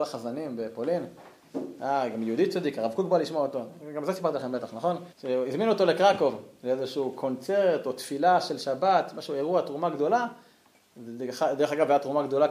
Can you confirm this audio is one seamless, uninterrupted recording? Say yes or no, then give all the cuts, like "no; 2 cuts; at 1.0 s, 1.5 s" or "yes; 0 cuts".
no; 1 cut; at 5.1 s